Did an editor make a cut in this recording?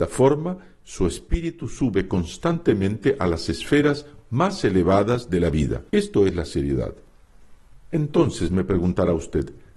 yes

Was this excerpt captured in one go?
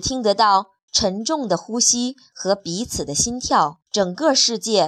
no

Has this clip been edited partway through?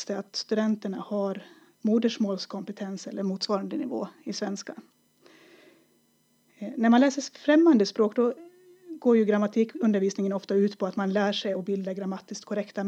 no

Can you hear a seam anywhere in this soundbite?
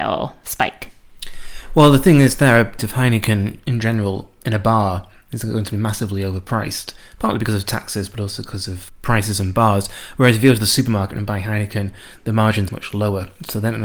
yes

